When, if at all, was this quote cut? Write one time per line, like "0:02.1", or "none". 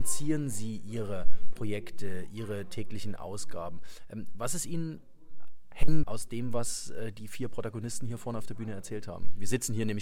0:06.0